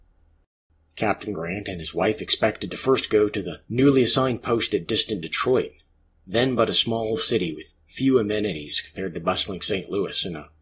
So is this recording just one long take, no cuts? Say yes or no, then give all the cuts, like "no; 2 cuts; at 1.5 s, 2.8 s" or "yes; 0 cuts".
yes; 0 cuts